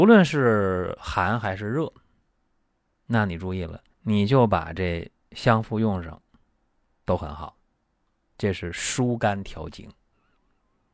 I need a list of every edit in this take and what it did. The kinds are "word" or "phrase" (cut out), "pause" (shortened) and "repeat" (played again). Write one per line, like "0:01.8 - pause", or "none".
0:03.9 - pause